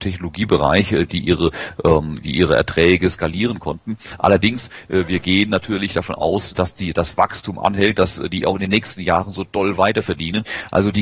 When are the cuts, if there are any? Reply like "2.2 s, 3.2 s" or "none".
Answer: none